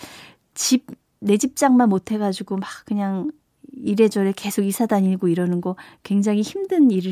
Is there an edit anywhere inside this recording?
no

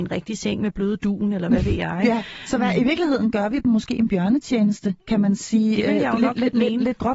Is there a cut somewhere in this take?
no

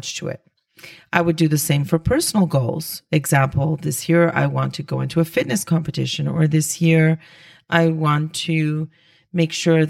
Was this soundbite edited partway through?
no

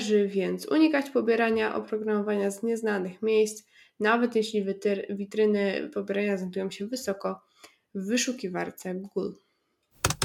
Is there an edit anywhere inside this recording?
no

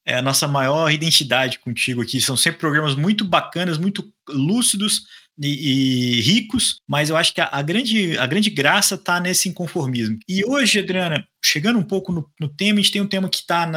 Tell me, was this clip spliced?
no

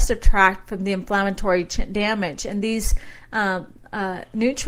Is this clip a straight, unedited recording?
yes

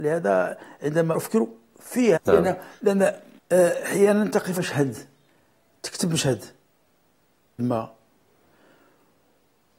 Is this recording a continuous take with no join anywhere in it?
no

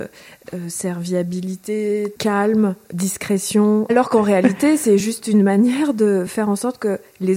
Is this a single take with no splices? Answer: yes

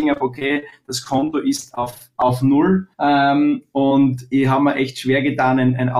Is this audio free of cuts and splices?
no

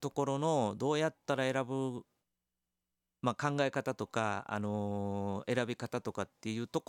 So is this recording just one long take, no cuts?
yes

